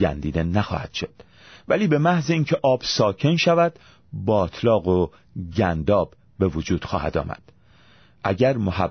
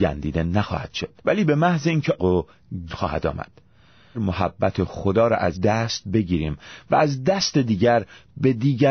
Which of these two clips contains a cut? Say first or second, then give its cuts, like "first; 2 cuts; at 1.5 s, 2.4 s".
second; 5 cuts; at 1.2 s, 2.2 s, 2.9 s, 4.1 s, 5.5 s